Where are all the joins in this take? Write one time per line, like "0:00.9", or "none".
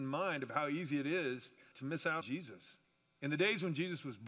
0:01.7
0:02.2